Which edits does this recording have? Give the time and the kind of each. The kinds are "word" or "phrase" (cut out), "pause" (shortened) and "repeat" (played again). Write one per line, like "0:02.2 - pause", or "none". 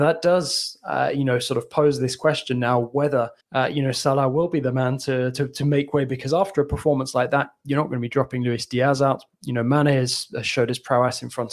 0:03.4 - pause